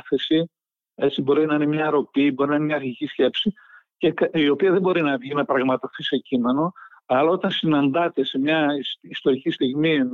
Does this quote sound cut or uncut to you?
uncut